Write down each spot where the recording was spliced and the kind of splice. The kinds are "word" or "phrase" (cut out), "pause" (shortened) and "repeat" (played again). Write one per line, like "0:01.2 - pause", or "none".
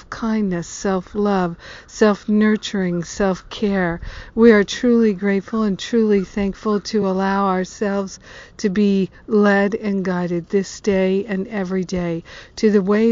none